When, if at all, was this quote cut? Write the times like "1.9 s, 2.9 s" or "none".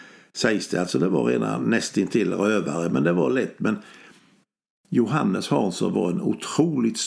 none